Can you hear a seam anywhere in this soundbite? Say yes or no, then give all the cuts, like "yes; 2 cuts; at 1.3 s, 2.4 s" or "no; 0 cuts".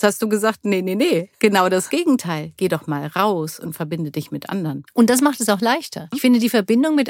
yes; 1 cut; at 1.3 s